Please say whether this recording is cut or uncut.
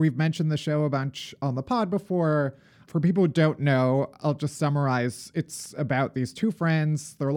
uncut